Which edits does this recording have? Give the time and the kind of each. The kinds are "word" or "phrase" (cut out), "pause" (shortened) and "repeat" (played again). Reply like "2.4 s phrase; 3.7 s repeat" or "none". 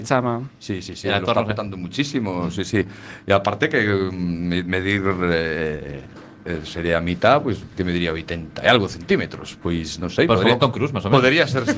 1.0 s word; 10.6 s word